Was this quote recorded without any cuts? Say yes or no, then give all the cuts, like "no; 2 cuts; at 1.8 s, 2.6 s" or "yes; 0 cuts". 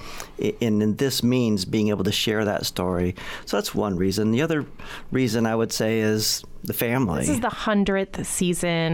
yes; 0 cuts